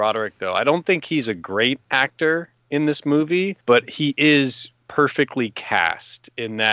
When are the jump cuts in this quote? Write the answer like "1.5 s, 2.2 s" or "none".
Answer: 3.6 s